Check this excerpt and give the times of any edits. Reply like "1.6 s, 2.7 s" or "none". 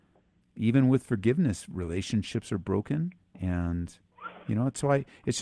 3.2 s

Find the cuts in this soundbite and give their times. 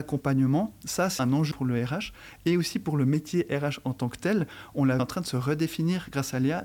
1.2 s, 1.5 s, 5.0 s

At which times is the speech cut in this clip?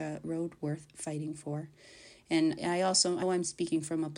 2.6 s, 3.2 s

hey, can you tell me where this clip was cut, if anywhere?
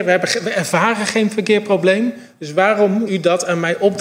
3.1 s

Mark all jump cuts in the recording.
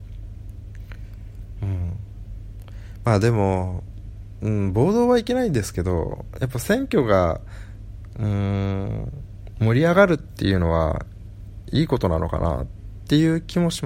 none

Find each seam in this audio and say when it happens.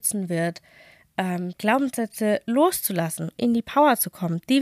1.5 s, 3.4 s

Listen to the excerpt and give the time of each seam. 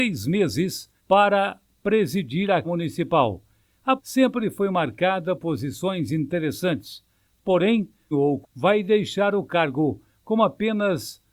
1.0 s, 2.6 s, 4.0 s, 5.4 s, 8.1 s, 8.4 s

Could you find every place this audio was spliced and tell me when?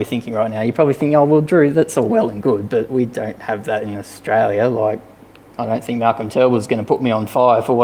none

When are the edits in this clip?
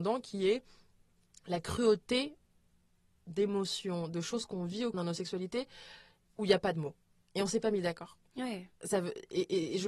3.3 s, 4.9 s

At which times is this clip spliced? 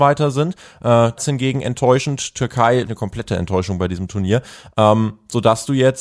1.2 s, 2.9 s

